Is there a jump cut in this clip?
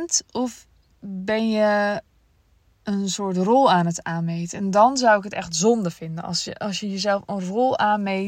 no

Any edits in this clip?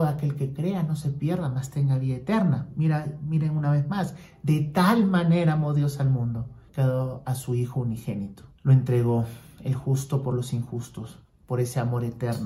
yes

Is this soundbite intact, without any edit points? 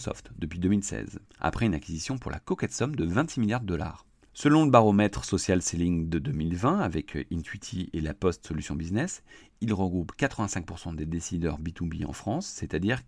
yes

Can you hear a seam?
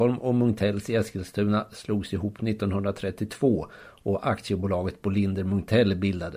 no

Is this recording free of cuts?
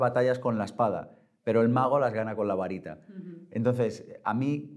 yes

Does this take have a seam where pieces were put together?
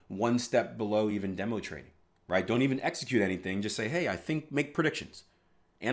no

